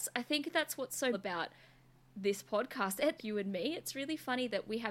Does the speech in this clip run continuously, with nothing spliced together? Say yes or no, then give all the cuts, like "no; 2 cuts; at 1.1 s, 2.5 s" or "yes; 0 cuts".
no; 2 cuts; at 1.1 s, 3.2 s